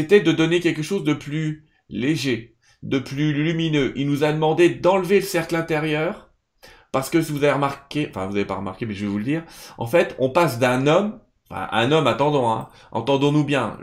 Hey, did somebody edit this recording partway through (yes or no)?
no